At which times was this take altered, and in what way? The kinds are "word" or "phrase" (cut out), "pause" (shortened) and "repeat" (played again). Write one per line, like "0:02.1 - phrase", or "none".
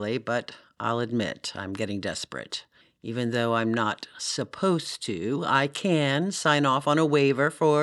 0:02.8 - pause